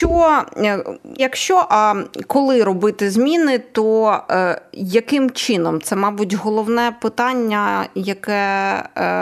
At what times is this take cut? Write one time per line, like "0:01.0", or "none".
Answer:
0:01.2